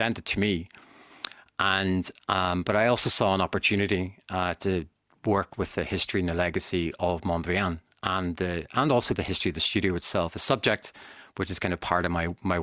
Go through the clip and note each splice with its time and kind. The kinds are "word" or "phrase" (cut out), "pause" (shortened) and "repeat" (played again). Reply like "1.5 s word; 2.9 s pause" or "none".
none

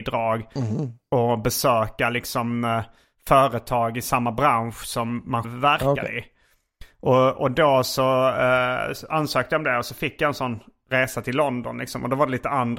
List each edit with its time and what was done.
5.4 s word

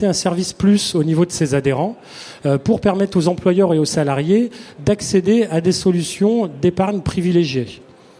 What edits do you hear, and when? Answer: none

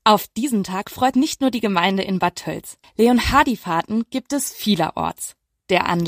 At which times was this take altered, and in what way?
1.1 s word

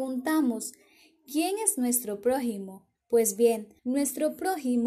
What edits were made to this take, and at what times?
2.9 s pause; 3.8 s pause

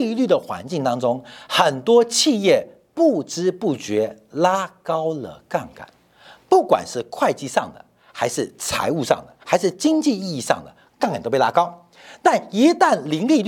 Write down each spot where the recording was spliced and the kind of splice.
9.4 s pause

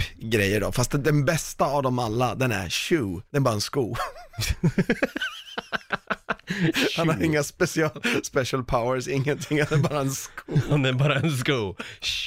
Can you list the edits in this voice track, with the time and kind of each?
3.3 s pause

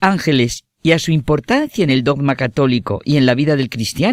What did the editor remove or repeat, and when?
none

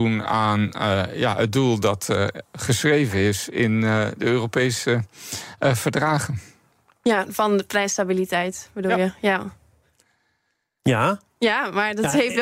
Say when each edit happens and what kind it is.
none

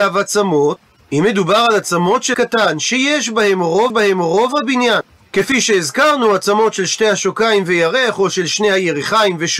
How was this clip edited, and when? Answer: 2.3 s word; 3.9 s repeat

